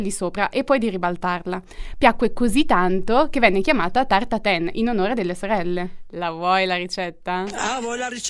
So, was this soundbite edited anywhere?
no; 0 cuts

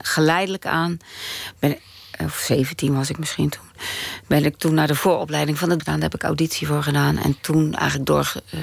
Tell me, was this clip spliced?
yes; 1 cut; at 5.8 s

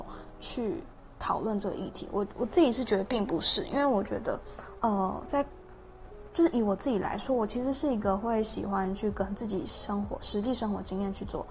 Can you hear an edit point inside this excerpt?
no; 0 cuts

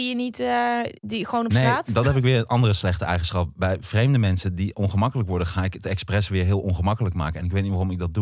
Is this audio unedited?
no; 1 cut; at 1.0 s

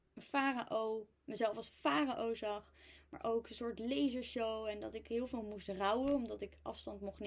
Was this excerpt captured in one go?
yes; 0 cuts

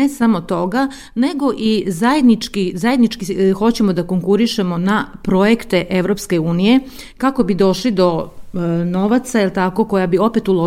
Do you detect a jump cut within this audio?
no; 0 cuts

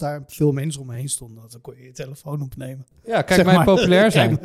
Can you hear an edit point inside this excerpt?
no; 0 cuts

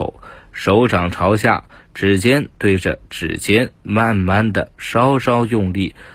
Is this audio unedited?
yes; 0 cuts

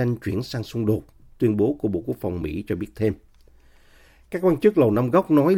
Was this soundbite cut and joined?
no; 0 cuts

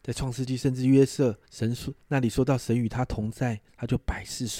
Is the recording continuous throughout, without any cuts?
no; 1 cut; at 1.4 s

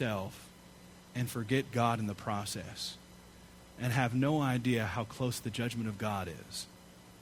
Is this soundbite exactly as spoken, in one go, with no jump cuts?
yes; 0 cuts

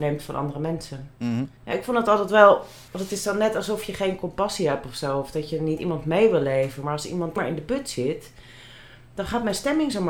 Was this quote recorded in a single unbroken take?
no; 5 cuts; at 1.1 s, 1.6 s, 2.9 s, 5.8 s, 7.4 s

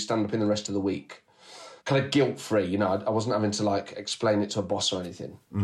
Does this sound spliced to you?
yes; 1 cut; at 1.8 s

